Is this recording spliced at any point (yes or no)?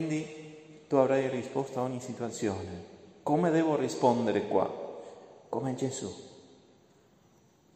no